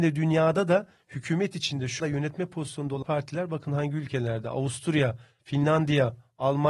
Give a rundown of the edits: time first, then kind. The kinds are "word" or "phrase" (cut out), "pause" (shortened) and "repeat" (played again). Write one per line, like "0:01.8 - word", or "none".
0:02.0 - word
0:03.0 - word
0:05.4 - word

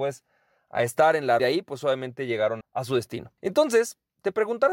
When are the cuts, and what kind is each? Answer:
0:01.4 - phrase
0:02.6 - word
0:03.4 - pause

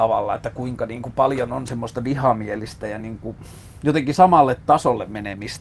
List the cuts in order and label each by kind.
none

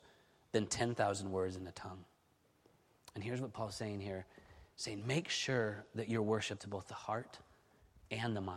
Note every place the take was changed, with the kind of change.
0:06.6 - word

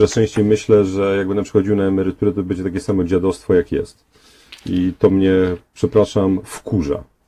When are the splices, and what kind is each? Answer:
none

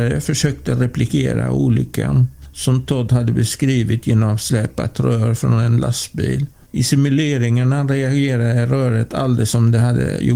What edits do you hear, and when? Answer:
none

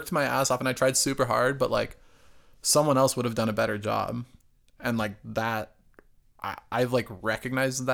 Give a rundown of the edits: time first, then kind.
none

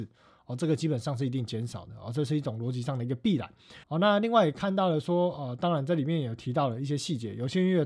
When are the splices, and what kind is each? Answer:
0:03.8 - pause

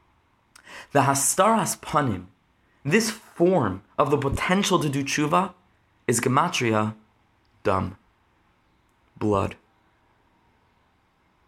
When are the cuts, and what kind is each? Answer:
none

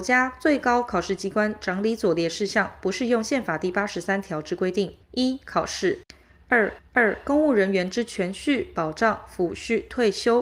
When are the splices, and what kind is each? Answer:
0:05.0 - pause
0:06.8 - repeat

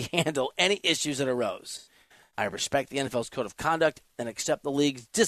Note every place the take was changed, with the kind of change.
none

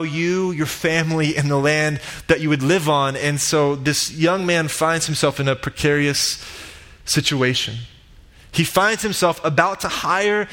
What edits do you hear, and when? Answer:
none

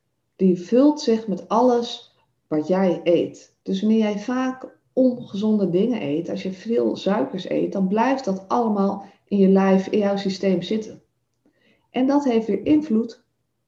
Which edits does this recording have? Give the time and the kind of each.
0:03.6 - pause

